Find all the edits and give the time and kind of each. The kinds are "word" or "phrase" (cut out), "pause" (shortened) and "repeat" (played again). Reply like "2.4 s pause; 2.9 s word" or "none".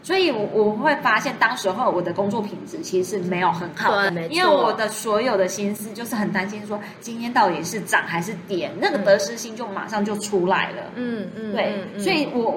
4.1 s word